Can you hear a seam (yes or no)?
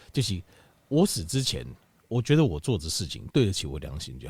no